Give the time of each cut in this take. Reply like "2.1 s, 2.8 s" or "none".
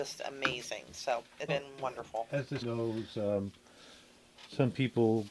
1.5 s, 2.6 s